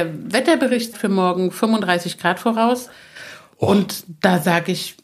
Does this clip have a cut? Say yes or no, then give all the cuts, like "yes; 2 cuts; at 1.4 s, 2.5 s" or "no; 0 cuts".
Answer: yes; 1 cut; at 0.9 s